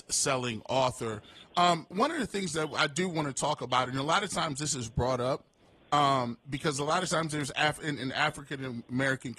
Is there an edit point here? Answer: no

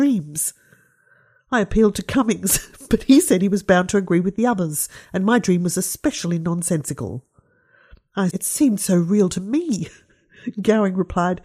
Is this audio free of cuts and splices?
no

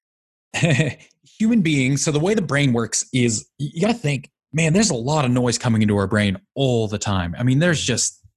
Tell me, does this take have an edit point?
no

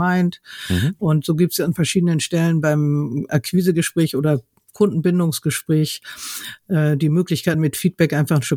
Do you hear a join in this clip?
no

